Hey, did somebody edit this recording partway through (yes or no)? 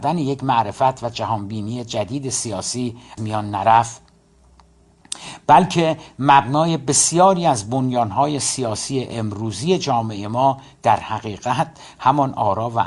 yes